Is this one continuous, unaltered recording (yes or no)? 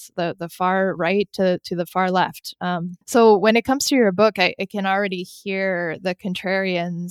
no